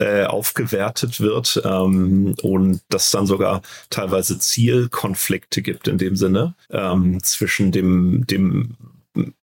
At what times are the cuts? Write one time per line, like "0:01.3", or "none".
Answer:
0:06.6